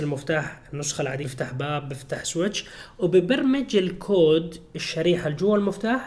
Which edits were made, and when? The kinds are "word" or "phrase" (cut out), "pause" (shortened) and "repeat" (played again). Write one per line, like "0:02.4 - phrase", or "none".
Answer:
0:01.2 - word